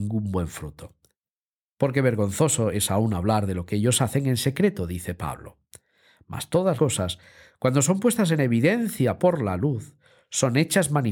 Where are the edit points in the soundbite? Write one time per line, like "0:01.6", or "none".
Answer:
0:06.8